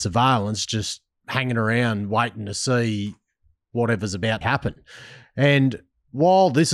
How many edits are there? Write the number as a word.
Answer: one